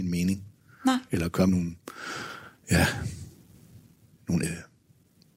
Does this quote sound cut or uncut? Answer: cut